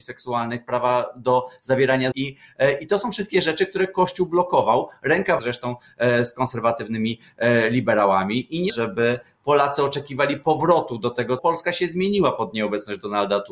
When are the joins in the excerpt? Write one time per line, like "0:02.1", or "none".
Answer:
0:02.1
0:05.4
0:08.7
0:11.4